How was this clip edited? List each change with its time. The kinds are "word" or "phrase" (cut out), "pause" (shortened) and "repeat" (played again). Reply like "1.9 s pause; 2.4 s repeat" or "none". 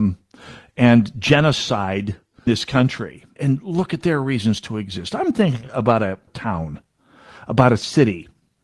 2.5 s word; 3.4 s word; 6.3 s phrase